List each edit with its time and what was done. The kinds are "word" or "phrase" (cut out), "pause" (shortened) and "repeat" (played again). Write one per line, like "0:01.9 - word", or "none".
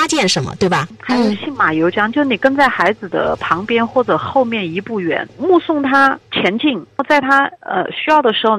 0:06.3 - pause